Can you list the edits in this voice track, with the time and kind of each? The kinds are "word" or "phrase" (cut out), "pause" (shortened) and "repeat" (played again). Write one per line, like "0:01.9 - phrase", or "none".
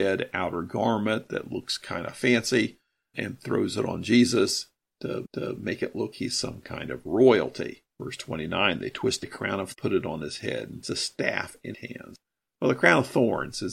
0:03.1 - word
0:05.2 - repeat
0:06.1 - word
0:07.9 - pause
0:09.2 - word
0:09.7 - word
0:10.8 - word
0:11.7 - phrase
0:12.3 - pause